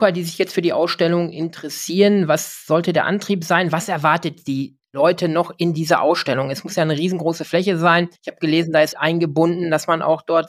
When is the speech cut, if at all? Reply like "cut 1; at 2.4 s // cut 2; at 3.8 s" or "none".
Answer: cut 1; at 8.2 s // cut 2; at 8.9 s